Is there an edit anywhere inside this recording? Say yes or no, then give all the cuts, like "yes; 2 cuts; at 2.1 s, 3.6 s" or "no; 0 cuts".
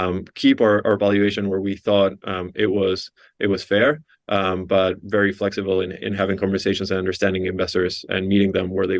no; 0 cuts